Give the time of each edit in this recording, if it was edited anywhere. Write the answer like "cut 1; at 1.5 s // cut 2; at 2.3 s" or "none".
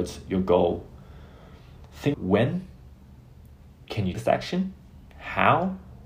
cut 1; at 2.1 s // cut 2; at 4.1 s // cut 3; at 5.1 s